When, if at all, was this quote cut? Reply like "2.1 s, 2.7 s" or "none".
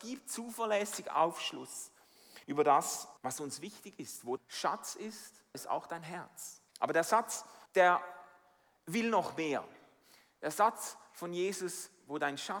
2.4 s, 3.2 s, 4.4 s, 5.5 s, 6.7 s, 7.7 s